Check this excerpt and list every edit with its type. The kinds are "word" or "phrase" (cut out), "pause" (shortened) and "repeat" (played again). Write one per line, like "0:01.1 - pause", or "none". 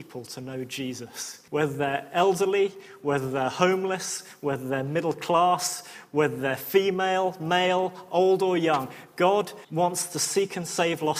0:01.5 - pause
0:09.6 - pause